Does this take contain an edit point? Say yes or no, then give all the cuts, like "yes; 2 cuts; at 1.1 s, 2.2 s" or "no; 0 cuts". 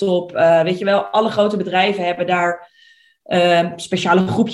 no; 0 cuts